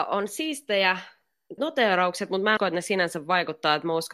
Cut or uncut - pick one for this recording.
cut